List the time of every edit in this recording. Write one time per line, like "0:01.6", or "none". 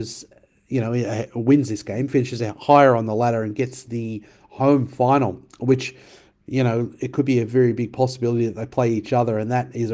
none